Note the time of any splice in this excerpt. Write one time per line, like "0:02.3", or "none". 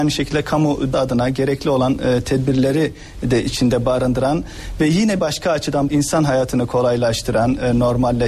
0:00.9
0:05.2
0:05.9